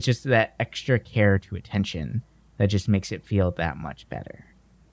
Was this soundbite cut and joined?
no; 0 cuts

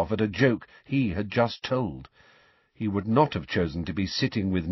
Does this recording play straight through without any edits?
yes; 0 cuts

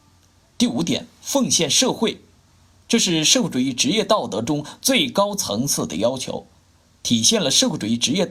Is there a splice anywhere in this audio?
no; 0 cuts

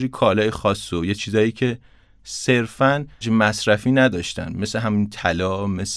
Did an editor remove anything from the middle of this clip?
yes; 2 cuts; at 1.2 s, 3.2 s

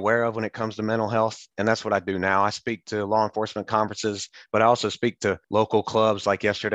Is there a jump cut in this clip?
yes; 1 cut; at 5.4 s

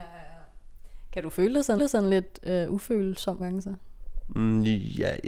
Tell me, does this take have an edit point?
yes; 2 cuts; at 1.8 s, 3.4 s

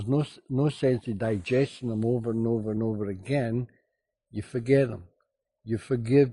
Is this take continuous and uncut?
yes; 0 cuts

